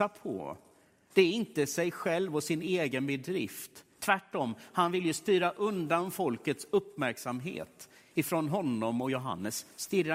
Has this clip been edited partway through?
no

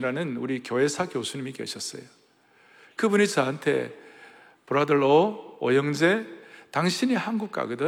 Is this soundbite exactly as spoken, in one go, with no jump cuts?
yes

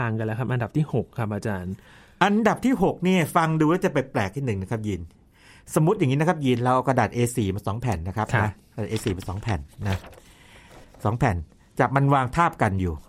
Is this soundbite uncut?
yes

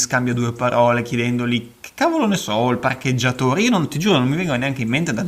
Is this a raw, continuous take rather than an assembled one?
yes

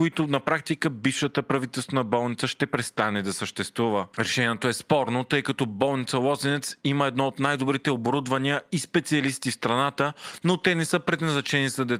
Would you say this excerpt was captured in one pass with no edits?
yes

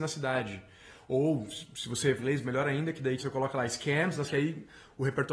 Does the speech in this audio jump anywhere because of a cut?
yes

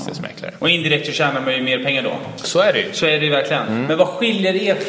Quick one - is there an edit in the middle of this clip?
no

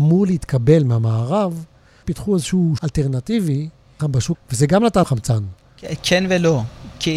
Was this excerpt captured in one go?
no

